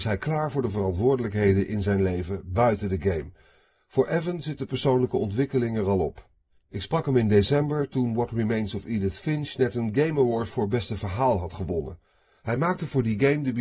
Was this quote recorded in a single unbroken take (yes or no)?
yes